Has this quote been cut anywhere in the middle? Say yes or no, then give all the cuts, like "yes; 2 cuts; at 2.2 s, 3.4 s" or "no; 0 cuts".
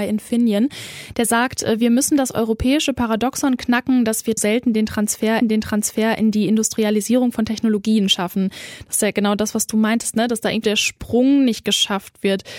yes; 3 cuts; at 4.4 s, 5.4 s, 10.6 s